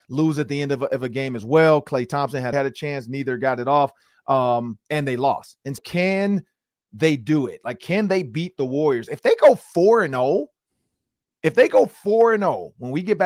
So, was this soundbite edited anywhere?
yes; 2 cuts; at 2.5 s, 5.8 s

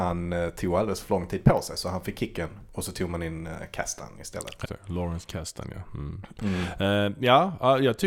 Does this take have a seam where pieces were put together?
yes; 1 cut; at 4.7 s

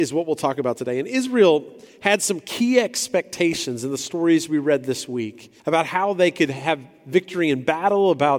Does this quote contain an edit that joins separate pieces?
yes; 1 cut; at 5.6 s

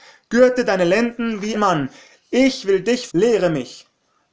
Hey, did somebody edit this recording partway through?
yes; 2 cuts; at 1.5 s, 3.1 s

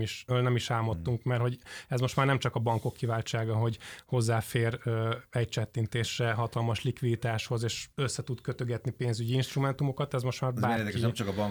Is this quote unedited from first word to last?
no; 1 cut; at 7.9 s

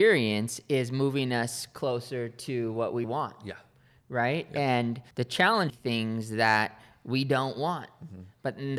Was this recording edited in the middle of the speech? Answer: yes; 3 cuts; at 3.0 s, 5.1 s, 5.7 s

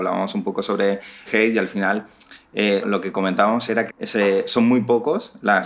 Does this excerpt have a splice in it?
yes; 3 cuts; at 1.3 s, 2.8 s, 3.9 s

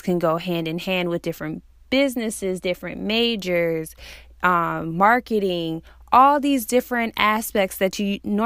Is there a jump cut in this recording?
no; 0 cuts

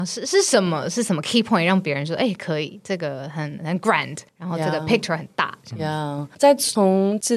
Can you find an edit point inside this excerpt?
yes; 2 cuts; at 4.3 s, 6.3 s

